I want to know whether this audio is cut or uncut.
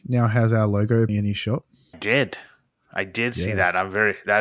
cut